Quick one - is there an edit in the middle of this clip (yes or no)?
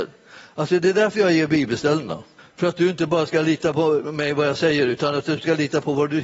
yes